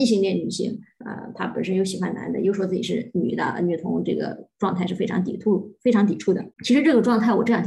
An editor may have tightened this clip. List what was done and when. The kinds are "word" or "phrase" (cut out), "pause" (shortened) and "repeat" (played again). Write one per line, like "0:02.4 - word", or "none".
0:06.5 - pause